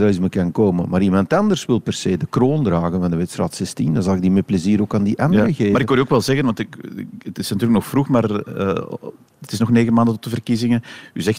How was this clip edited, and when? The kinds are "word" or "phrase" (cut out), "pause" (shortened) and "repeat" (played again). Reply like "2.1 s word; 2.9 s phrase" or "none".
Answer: none